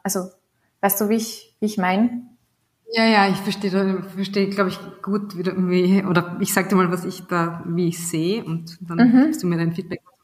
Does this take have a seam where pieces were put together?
no; 0 cuts

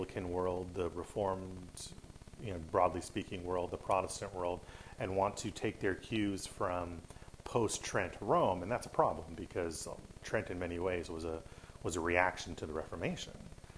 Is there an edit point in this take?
no; 0 cuts

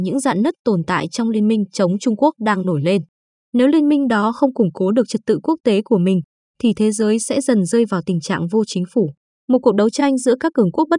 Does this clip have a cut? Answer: no; 0 cuts

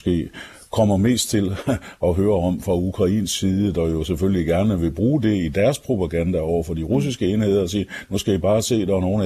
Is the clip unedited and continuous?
yes; 0 cuts

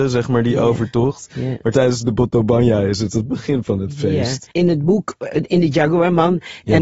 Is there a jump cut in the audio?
no; 0 cuts

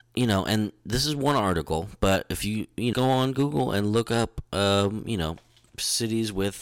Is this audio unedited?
no; 1 cut; at 2.9 s

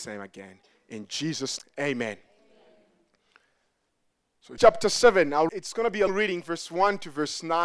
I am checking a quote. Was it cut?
yes; 5 cuts; at 1.6 s, 4.6 s, 5.5 s, 6.1 s, 6.4 s

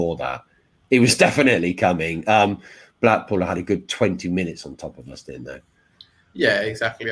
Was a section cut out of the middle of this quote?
no; 0 cuts

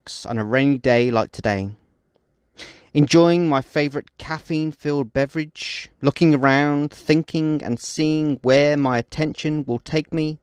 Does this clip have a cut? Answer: yes; 1 cut; at 5.9 s

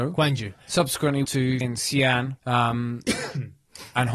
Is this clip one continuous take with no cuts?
no; 3 cuts; at 1.2 s, 1.6 s, 2.4 s

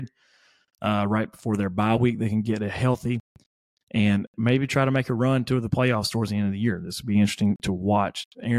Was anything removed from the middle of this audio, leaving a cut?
no; 0 cuts

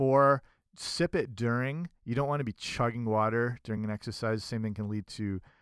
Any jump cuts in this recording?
no; 0 cuts

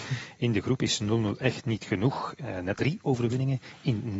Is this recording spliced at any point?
yes; 1 cut; at 2.8 s

